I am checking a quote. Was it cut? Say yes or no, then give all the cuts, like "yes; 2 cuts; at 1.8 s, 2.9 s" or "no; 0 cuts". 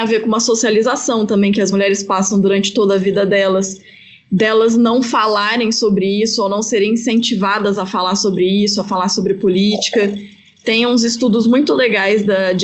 no; 0 cuts